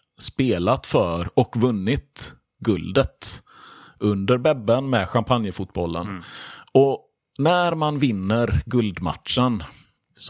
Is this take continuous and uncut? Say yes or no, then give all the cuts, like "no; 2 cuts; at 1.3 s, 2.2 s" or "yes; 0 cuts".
yes; 0 cuts